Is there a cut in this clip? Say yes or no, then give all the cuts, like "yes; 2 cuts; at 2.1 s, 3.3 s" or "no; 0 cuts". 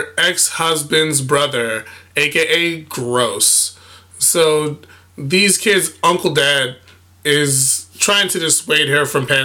no; 0 cuts